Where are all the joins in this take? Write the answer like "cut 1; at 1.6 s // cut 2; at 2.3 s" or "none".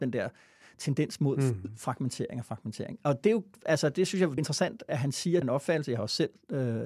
cut 1; at 4.4 s // cut 2; at 5.4 s